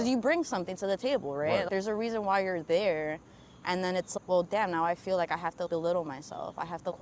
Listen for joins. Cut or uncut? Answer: uncut